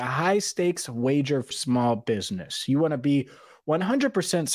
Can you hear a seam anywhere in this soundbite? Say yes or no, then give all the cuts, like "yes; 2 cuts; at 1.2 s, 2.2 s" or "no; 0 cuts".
yes; 1 cut; at 1.5 s